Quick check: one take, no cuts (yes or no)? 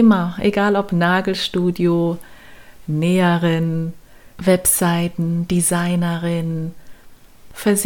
yes